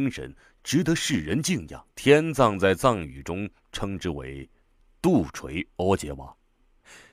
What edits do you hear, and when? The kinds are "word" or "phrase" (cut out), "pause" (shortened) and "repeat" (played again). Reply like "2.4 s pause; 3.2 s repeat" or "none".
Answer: 1.9 s pause; 4.6 s pause